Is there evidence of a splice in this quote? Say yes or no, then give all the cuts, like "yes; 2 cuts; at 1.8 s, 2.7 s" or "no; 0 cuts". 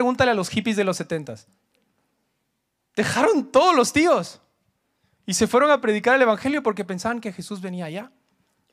no; 0 cuts